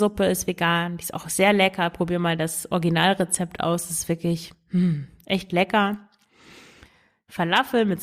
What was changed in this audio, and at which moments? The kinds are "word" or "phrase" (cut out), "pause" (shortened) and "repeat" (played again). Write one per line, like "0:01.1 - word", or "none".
none